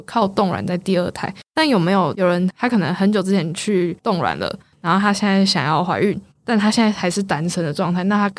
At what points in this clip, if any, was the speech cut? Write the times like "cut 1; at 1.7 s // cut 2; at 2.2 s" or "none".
cut 1; at 1.4 s

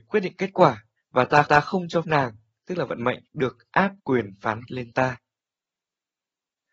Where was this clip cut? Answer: cut 1; at 1.0 s // cut 2; at 1.4 s // cut 3; at 2.0 s // cut 4; at 3.3 s // cut 5; at 4.0 s // cut 6; at 4.7 s

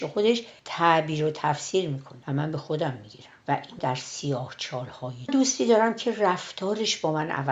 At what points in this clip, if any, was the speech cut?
cut 1; at 3.8 s // cut 2; at 5.3 s

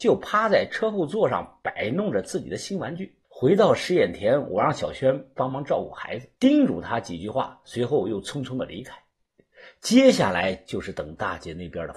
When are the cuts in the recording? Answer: cut 1; at 3.2 s // cut 2; at 6.4 s

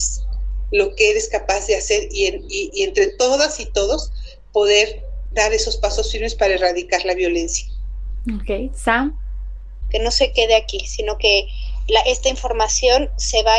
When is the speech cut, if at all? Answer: none

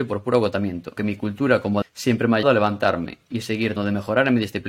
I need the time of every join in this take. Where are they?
cut 1; at 1.0 s // cut 2; at 1.8 s // cut 3; at 2.4 s // cut 4; at 3.8 s

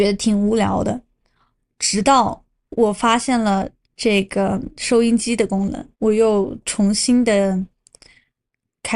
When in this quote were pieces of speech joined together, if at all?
cut 1; at 3.8 s // cut 2; at 5.9 s

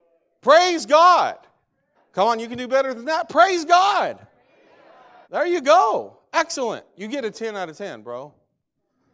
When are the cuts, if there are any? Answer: cut 1; at 1.9 s // cut 2; at 5.2 s

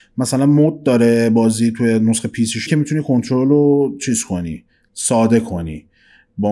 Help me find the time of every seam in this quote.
cut 1; at 2.7 s

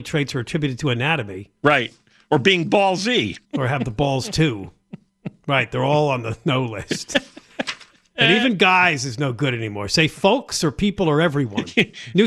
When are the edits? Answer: cut 1; at 3.4 s

